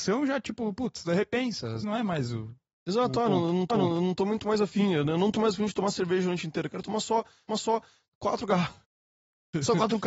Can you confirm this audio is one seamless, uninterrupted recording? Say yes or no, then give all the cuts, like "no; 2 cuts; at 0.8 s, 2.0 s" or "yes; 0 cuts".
no; 5 cuts; at 1.8 s, 3.7 s, 5.3 s, 7.5 s, 8.8 s